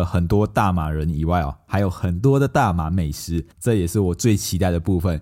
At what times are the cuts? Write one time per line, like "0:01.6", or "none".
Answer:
0:03.5